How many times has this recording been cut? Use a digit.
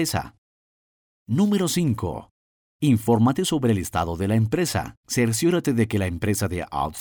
1